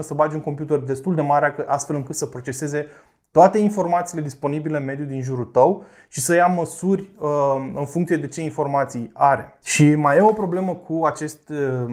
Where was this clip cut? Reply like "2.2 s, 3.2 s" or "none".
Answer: none